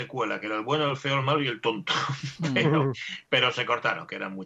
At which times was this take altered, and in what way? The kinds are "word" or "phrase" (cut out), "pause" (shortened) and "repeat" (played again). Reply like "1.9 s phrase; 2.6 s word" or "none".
none